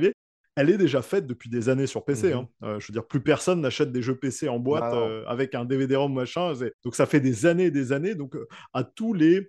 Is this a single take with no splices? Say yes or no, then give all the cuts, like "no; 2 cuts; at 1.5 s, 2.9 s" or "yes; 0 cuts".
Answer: no; 1 cut; at 6.7 s